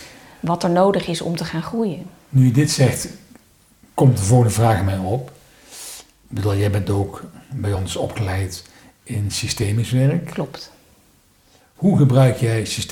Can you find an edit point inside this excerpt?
no; 0 cuts

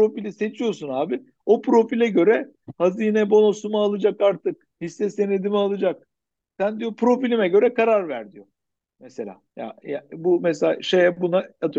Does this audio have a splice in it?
yes; 2 cuts; at 4.7 s, 9.5 s

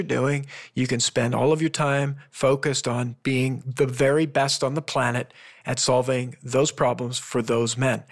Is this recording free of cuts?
yes; 0 cuts

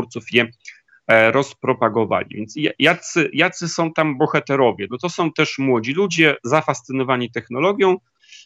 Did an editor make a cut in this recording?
no; 0 cuts

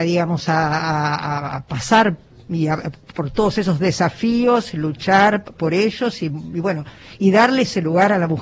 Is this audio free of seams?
yes; 0 cuts

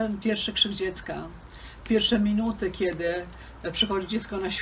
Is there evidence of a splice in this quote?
no; 0 cuts

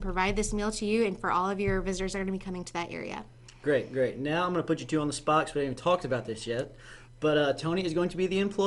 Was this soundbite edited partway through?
no; 0 cuts

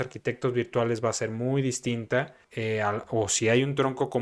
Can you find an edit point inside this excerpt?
yes; 1 cut; at 2.4 s

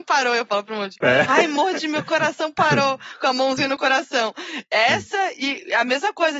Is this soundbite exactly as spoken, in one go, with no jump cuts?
yes; 0 cuts

